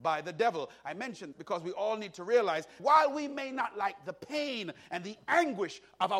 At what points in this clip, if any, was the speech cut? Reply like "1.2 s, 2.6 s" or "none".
1.3 s, 2.8 s